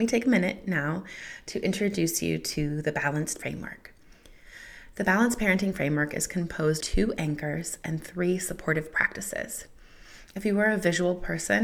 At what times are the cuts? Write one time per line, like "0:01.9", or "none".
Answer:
0:03.4
0:06.8